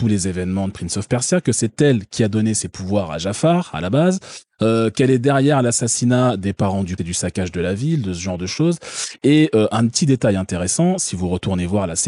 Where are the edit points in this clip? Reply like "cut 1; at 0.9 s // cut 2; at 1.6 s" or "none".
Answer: cut 1; at 7.0 s